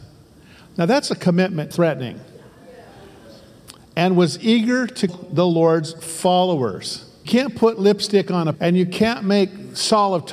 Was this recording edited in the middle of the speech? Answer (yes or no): yes